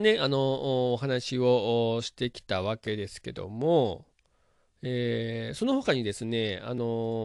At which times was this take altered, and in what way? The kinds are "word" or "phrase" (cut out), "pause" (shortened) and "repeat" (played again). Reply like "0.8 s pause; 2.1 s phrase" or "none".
none